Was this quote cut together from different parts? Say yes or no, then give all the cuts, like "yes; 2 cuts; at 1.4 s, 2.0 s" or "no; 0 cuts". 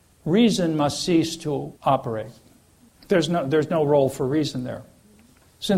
yes; 1 cut; at 1.8 s